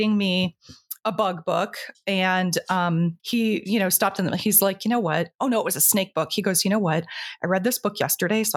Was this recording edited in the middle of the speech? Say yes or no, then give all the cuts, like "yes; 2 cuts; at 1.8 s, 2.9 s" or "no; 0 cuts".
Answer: yes; 1 cut; at 3.2 s